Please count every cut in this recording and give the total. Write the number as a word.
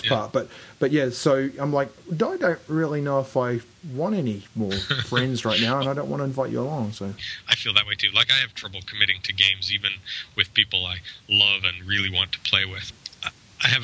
one